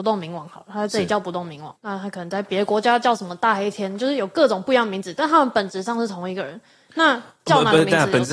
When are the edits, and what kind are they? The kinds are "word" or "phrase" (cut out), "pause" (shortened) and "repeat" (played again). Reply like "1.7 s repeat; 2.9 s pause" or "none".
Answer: 1.8 s pause